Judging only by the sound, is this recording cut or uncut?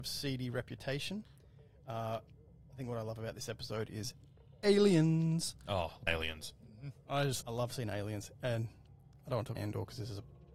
cut